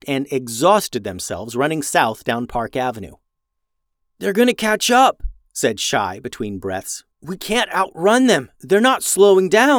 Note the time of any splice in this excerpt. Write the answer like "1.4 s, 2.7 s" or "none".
none